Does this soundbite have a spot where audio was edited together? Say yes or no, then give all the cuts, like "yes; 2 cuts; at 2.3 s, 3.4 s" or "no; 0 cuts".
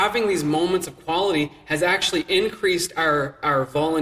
no; 0 cuts